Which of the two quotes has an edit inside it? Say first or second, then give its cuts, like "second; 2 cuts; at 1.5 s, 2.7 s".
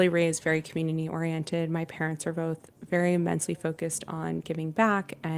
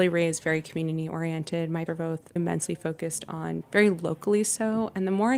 second; 3 cuts; at 1.9 s, 2.4 s, 3.6 s